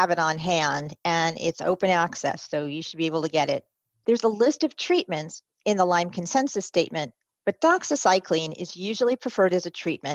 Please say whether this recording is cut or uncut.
uncut